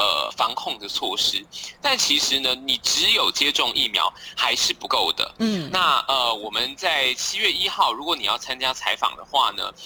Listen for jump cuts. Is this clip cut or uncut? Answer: uncut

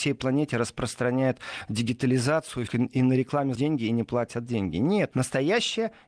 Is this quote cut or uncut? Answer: cut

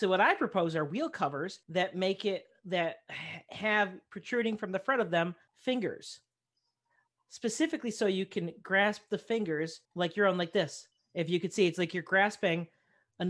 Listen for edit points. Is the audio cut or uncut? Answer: cut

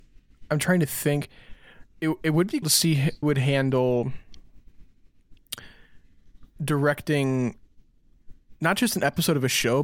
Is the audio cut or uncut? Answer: cut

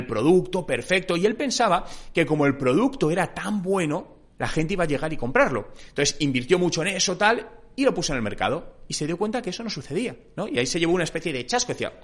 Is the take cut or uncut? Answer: uncut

